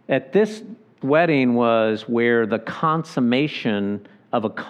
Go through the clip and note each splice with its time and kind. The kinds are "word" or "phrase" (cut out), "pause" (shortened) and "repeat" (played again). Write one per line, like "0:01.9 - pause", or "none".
0:01.0 - phrase